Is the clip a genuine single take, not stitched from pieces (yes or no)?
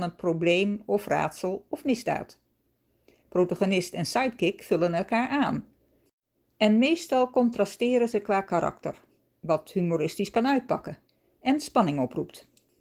yes